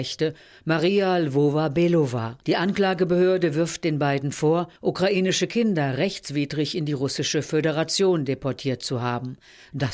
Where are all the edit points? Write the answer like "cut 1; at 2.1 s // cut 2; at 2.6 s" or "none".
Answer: cut 1; at 2.4 s // cut 2; at 4.8 s